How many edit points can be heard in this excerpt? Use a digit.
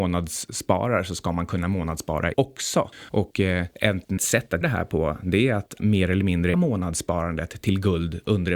5